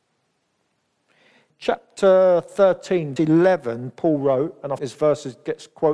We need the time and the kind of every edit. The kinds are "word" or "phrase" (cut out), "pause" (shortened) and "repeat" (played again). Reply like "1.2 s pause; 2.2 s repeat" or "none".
1.5 s word; 3.2 s word; 4.8 s word